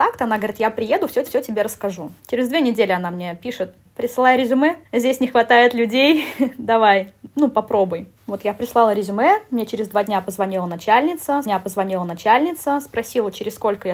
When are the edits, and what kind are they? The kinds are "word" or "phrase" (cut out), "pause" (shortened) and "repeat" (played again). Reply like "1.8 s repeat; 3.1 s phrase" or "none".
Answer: 1.3 s repeat; 2.2 s pause; 4.9 s pause; 8.2 s pause; 11.4 s repeat